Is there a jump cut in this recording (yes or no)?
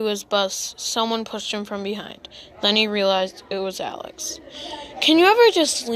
no